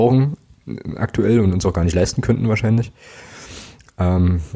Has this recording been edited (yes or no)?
no